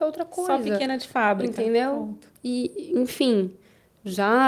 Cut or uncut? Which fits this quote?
uncut